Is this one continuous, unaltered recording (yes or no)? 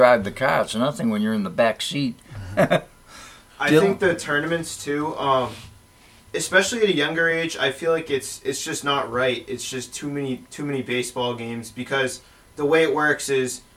yes